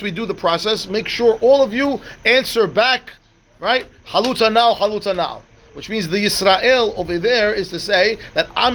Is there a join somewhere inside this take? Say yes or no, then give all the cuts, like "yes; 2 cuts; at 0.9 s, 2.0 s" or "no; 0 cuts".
no; 0 cuts